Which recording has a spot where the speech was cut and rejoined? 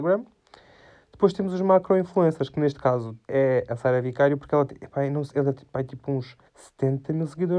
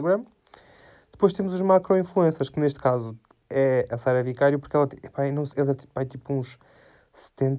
first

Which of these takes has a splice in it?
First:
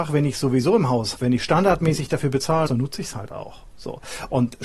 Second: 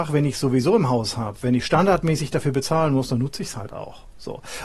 first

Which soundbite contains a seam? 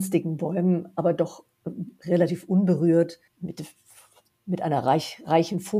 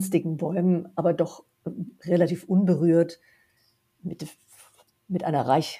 first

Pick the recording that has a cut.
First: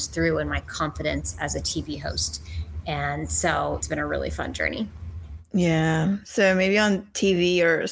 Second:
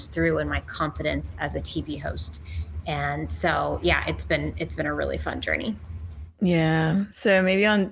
first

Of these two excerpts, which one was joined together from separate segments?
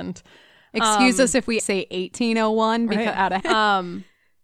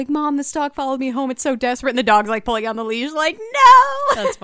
first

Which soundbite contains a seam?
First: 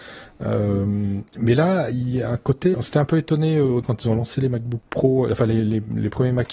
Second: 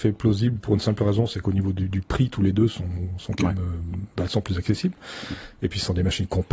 first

